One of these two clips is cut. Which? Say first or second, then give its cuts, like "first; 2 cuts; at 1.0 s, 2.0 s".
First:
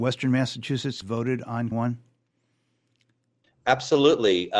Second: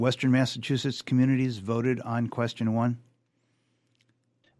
first; 2 cuts; at 1.0 s, 1.7 s